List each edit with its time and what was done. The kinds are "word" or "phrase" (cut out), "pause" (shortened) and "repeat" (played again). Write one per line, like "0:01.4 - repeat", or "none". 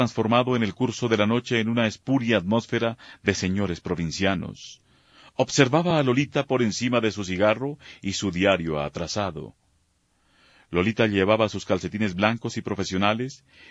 none